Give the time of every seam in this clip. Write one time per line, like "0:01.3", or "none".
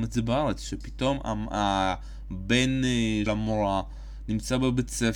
0:03.3